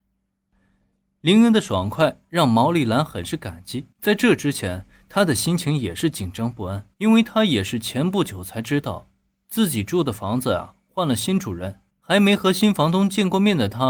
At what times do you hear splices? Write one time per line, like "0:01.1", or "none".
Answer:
0:03.9
0:06.9
0:11.9

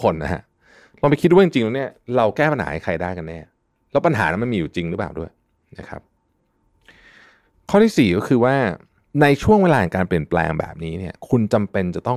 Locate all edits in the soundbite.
none

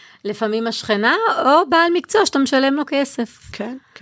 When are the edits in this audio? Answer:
none

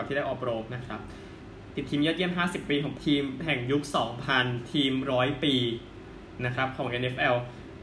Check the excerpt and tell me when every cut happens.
0:03.0

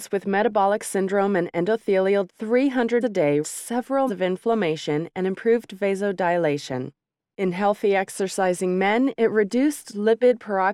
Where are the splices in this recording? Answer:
0:02.3
0:03.0
0:03.4
0:04.1

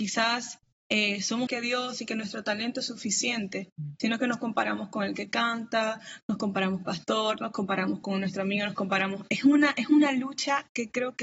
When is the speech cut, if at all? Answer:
0:01.5
0:06.8

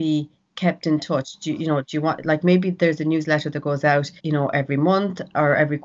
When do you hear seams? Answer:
0:04.2

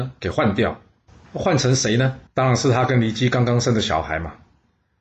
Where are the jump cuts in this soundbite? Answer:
0:02.3

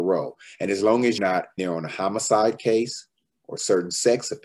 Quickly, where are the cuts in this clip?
0:01.2
0:01.6

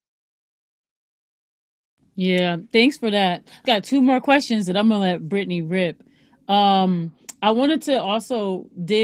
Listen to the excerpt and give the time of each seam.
0:03.7

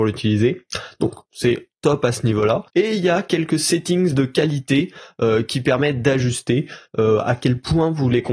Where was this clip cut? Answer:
0:01.3
0:02.7

